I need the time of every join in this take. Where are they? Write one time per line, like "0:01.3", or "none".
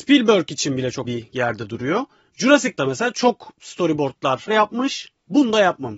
0:01.0
0:02.8
0:04.5

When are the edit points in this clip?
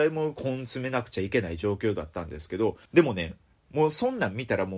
0:02.9

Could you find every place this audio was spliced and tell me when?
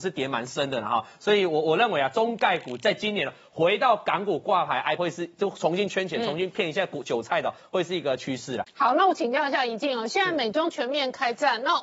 0:05.0

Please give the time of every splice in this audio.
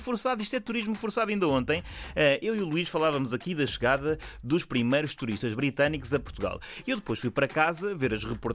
none

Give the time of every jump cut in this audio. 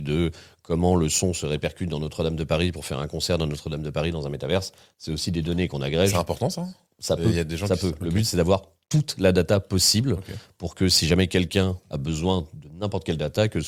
none

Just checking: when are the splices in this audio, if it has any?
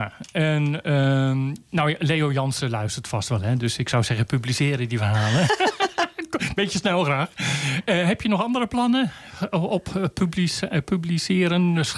none

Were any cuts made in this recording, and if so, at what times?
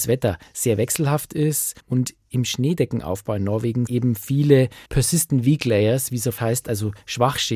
0:01.8
0:03.9
0:04.9
0:06.4

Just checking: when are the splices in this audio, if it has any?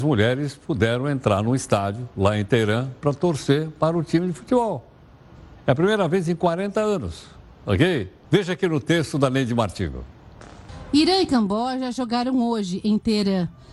0:08.2

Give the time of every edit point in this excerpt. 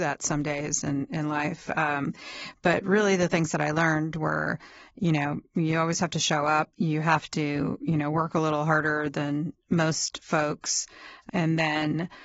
0:06.7

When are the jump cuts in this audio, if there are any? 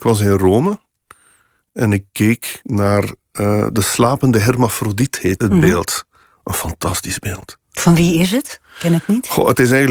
0:05.4

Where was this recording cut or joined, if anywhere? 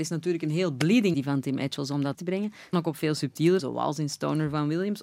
0:01.1
0:02.1
0:02.7
0:03.6

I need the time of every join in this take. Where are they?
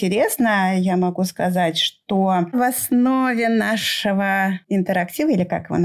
0:02.5

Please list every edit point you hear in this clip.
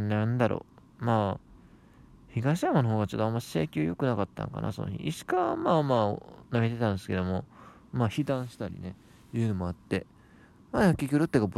none

